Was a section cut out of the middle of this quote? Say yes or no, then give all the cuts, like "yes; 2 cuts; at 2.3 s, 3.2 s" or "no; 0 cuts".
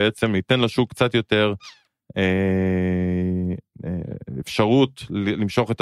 no; 0 cuts